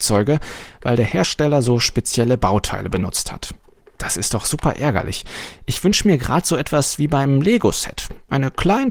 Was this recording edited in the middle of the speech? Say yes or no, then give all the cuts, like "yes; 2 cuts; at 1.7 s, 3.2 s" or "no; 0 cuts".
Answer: no; 0 cuts